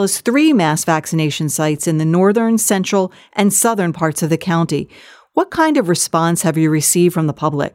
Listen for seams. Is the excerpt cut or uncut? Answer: uncut